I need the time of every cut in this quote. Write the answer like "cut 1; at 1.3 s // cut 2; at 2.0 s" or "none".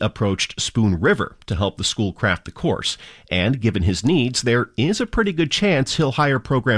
none